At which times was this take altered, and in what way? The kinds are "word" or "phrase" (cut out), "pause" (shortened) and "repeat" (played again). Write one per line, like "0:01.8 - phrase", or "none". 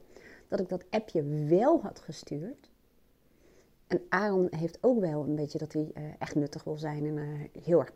none